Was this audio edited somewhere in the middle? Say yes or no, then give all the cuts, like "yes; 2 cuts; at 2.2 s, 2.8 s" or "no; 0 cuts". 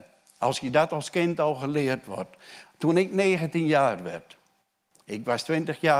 no; 0 cuts